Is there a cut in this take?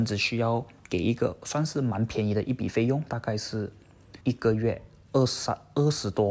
yes; 1 cut; at 4.2 s

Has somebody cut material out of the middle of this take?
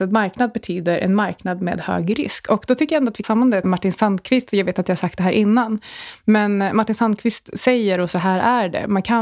yes; 2 cuts; at 3.2 s, 3.6 s

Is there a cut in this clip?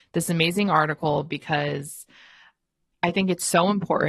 no; 0 cuts

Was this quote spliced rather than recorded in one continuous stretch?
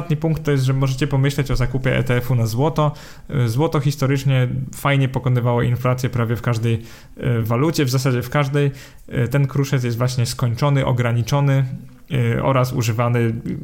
no; 0 cuts

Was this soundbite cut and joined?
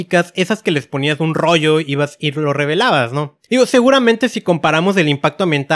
yes; 1 cut; at 3.4 s

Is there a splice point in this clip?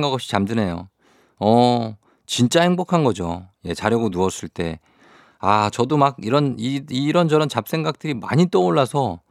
no; 0 cuts

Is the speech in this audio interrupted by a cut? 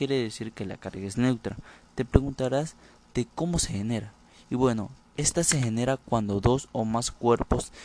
no; 0 cuts

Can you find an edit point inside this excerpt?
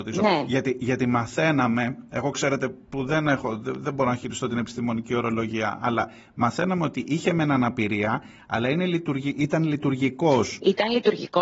no; 0 cuts

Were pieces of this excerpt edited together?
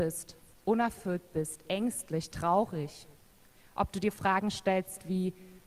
no; 0 cuts

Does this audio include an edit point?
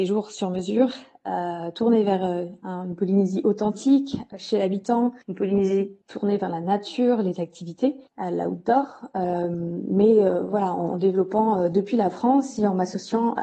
yes; 3 cuts; at 5.2 s, 6.0 s, 8.1 s

